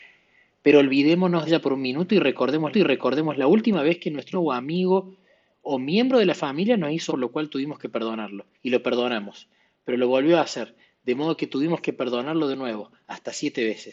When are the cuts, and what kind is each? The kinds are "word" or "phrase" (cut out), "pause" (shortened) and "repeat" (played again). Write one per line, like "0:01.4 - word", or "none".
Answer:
0:01.5 - word
0:02.7 - repeat
0:04.3 - word
0:07.1 - word
0:08.5 - pause